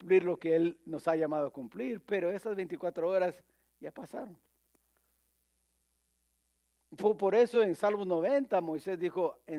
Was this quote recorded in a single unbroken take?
yes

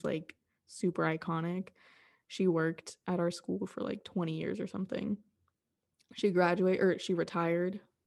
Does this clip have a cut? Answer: no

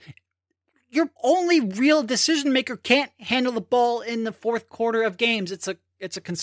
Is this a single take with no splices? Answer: no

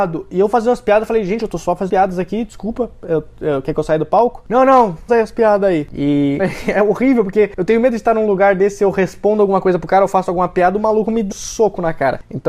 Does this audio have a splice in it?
yes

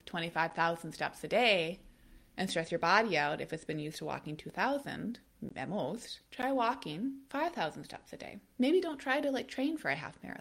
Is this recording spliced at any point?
yes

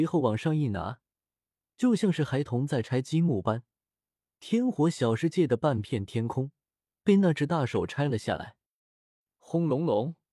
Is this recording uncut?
yes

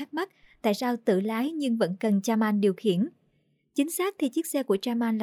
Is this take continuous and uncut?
yes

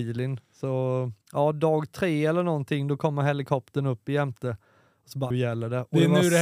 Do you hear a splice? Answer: yes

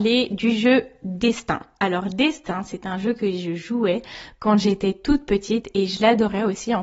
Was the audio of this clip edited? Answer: no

